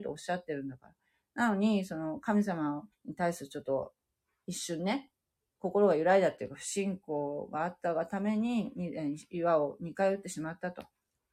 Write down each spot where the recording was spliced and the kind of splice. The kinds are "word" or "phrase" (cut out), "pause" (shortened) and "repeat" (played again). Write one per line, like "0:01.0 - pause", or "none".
0:02.9 - pause

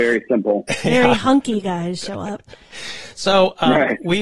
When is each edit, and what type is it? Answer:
none

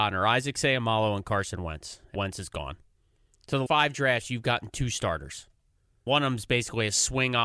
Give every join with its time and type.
0:02.1 - word
0:03.7 - word
0:06.1 - word

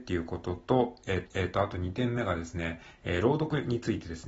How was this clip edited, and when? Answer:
0:01.3 - repeat

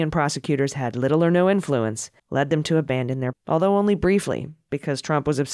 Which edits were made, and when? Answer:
0:02.2 - pause
0:03.3 - word

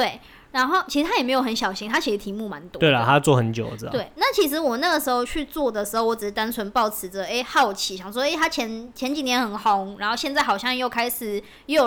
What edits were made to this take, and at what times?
none

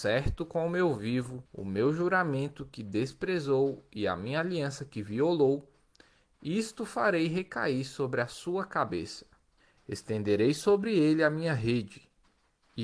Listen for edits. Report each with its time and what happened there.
0:01.5 - pause
0:09.6 - pause

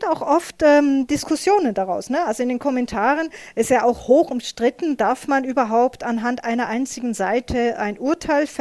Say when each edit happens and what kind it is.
none

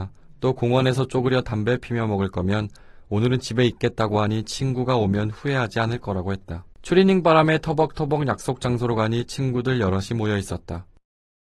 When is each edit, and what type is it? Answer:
0:06.7 - pause

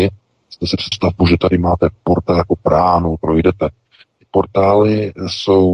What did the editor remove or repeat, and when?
0:00.9 - word
0:03.2 - word

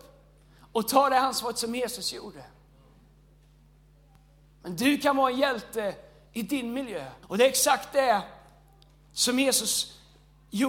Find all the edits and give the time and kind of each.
0:07.2 - pause

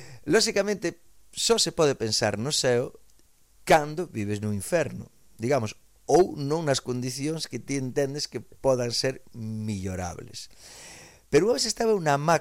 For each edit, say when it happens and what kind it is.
none

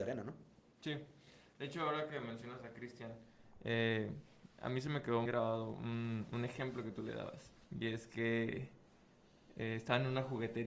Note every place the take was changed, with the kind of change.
0:05.3 - word
0:07.6 - pause

